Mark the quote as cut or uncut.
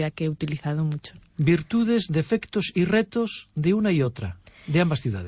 uncut